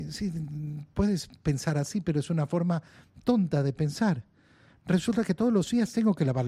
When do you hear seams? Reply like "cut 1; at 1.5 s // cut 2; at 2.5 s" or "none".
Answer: none